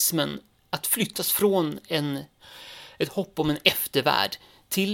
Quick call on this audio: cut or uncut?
uncut